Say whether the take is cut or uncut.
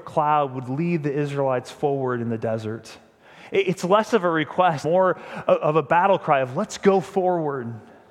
cut